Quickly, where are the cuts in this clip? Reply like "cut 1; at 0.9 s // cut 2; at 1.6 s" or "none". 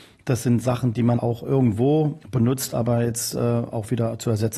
cut 1; at 1.2 s // cut 2; at 2.2 s